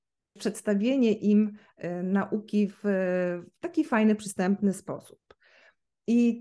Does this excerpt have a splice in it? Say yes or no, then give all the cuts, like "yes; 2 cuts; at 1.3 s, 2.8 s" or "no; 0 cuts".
no; 0 cuts